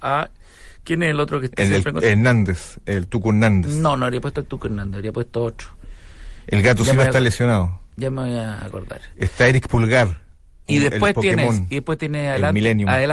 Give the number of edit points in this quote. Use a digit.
0